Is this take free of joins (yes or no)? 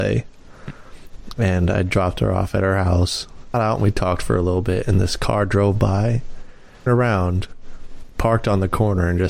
no